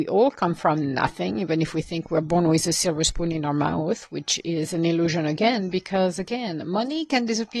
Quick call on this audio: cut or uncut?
uncut